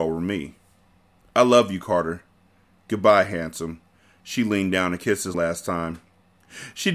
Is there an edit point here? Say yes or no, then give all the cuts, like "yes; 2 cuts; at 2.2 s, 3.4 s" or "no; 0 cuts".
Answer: yes; 1 cut; at 5.3 s